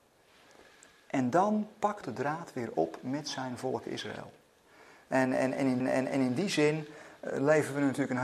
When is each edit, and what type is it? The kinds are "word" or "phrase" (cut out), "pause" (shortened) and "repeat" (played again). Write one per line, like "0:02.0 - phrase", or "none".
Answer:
0:02.0 - word
0:05.8 - repeat